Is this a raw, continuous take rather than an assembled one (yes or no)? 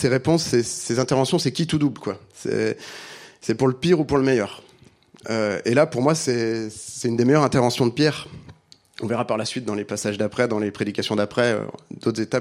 yes